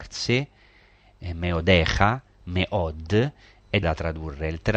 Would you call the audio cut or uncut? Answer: cut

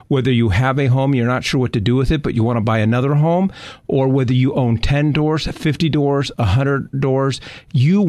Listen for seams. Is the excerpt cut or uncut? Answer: uncut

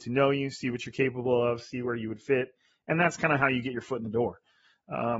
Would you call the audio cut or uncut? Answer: uncut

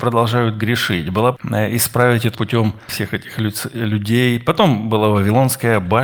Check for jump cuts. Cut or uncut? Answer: cut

